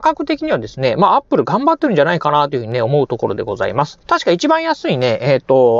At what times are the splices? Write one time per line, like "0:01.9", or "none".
0:04.0